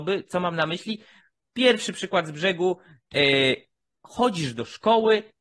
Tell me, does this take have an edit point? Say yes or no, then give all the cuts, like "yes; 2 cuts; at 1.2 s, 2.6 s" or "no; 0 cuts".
no; 0 cuts